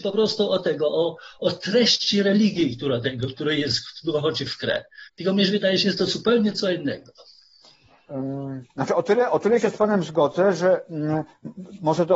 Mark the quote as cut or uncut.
cut